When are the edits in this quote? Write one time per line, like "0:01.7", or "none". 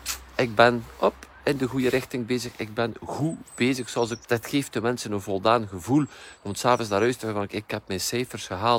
0:04.2
0:07.5